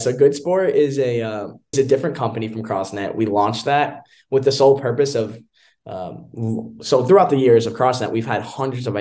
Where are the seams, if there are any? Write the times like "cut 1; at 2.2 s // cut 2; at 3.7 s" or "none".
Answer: cut 1; at 1.7 s